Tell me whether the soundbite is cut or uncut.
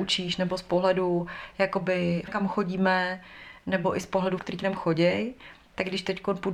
cut